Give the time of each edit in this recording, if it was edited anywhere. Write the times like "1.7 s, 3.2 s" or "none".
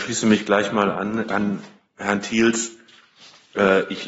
none